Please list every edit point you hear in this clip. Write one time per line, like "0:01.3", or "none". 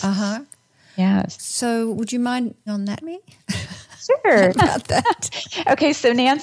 0:02.7
0:03.0
0:04.5